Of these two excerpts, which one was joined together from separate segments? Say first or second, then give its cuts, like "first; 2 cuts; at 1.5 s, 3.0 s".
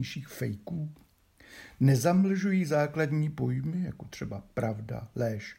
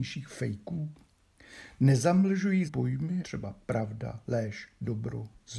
second; 2 cuts; at 2.7 s, 3.2 s